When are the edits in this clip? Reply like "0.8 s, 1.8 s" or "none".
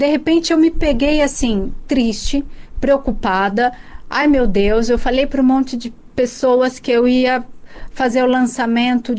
none